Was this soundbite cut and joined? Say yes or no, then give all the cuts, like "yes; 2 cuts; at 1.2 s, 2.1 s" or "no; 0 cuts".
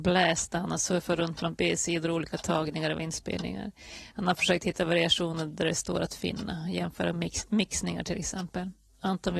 no; 0 cuts